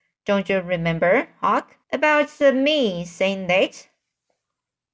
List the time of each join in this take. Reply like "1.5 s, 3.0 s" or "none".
1.8 s